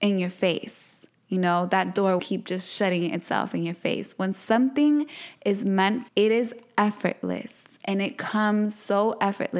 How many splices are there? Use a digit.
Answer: 2